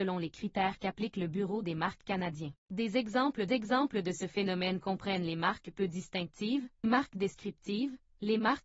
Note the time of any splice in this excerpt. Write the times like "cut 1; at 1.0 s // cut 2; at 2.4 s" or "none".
cut 1; at 2.6 s // cut 2; at 3.5 s // cut 3; at 6.8 s